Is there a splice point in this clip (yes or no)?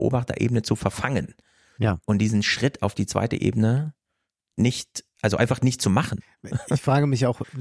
no